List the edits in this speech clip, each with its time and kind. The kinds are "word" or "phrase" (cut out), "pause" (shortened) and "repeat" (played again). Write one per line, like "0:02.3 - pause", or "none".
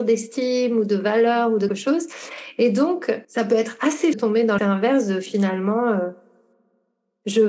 0:01.7 - word
0:03.2 - pause
0:04.1 - phrase
0:04.6 - word